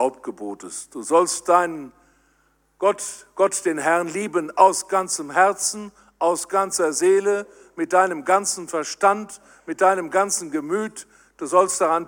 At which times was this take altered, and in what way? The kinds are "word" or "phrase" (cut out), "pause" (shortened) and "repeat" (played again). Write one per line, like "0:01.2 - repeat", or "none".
none